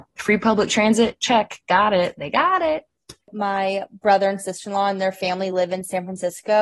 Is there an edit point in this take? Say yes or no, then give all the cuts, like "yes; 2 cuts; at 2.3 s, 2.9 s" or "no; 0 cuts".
no; 0 cuts